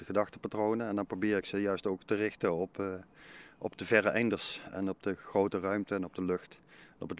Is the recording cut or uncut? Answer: uncut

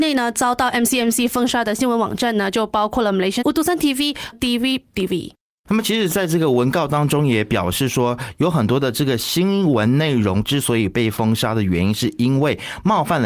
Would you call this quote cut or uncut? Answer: cut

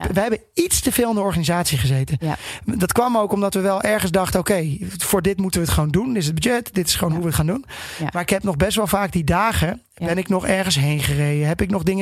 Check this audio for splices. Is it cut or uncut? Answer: uncut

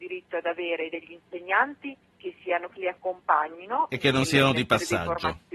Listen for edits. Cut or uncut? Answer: cut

